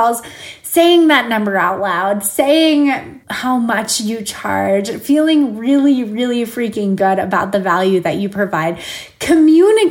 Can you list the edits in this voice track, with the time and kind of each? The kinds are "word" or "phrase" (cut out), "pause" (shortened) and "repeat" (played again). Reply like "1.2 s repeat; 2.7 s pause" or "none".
3.2 s pause